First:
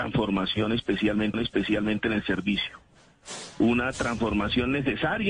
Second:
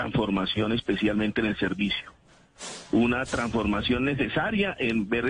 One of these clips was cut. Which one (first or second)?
first